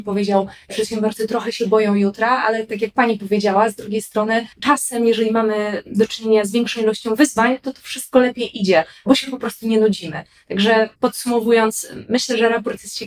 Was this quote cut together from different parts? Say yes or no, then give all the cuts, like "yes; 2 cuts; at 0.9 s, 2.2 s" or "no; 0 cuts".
yes; 2 cuts; at 4.5 s, 11.0 s